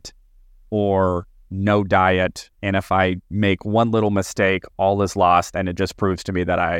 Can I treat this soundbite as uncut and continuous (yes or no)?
no